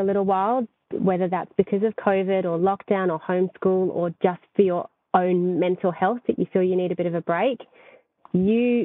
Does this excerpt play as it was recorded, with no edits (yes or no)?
yes